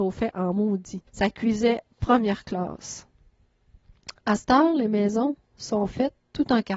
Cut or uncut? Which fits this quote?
cut